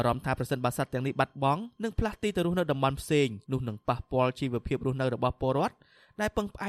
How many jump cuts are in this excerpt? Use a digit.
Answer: 2